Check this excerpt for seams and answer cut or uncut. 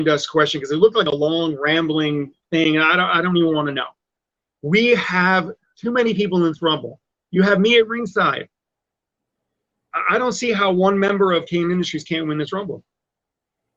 uncut